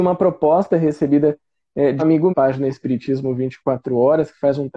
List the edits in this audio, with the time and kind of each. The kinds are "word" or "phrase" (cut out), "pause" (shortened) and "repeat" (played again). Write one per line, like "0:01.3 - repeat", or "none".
0:02.0 - word
0:02.3 - phrase